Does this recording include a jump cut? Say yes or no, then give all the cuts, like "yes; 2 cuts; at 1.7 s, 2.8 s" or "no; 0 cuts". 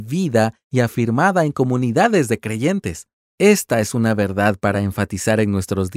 no; 0 cuts